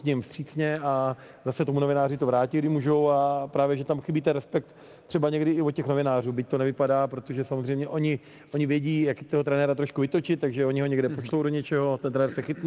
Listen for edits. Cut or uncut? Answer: uncut